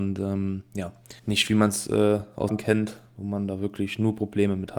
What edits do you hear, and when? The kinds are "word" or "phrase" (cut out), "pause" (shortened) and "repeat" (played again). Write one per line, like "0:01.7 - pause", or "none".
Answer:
0:01.2 - pause
0:02.5 - phrase